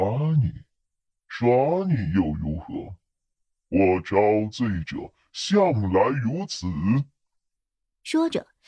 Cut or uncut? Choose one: uncut